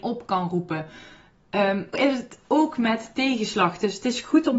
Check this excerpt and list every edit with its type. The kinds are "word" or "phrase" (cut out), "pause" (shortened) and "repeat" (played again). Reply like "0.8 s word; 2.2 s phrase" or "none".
1.9 s word